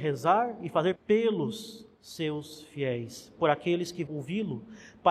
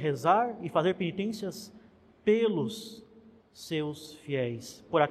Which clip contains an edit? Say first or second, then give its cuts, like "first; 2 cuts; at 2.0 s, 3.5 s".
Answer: first; 3 cuts; at 1.0 s, 1.9 s, 4.1 s